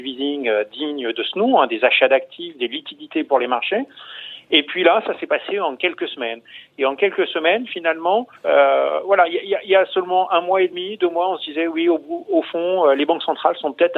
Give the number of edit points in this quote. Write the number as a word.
one